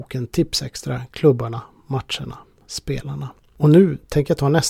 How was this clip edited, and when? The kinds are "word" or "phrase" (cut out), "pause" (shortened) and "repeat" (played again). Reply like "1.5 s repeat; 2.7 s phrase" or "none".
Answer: none